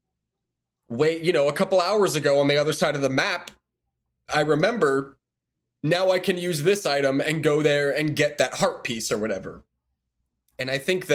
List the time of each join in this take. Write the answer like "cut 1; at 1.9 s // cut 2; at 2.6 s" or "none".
none